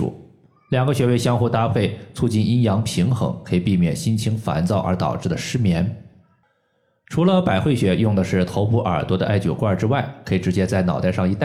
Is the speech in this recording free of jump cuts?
yes; 0 cuts

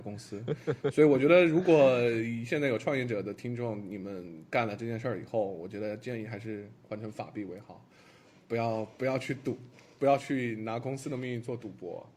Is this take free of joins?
yes; 0 cuts

